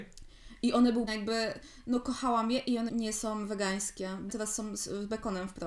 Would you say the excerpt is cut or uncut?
cut